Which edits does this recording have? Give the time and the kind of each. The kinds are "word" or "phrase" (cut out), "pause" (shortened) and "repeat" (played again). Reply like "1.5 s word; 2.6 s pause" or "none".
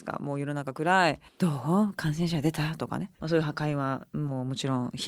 1.3 s pause; 3.1 s pause